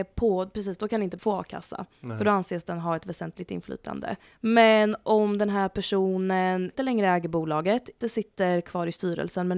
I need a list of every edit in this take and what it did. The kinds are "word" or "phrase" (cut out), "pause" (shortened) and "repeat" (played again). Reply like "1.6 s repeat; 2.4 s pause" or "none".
1.2 s word; 4.2 s pause; 6.7 s word; 8.0 s word